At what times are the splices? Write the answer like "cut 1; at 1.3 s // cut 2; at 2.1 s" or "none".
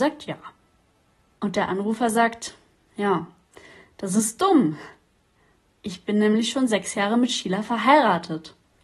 none